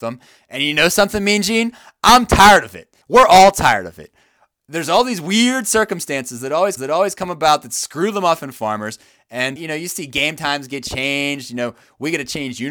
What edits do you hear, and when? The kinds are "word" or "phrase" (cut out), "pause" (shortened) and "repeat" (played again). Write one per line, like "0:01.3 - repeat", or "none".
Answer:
0:03.0 - pause
0:06.8 - repeat
0:09.6 - word